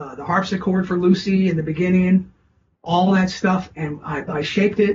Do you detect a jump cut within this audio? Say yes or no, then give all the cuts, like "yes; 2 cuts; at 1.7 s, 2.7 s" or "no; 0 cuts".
no; 0 cuts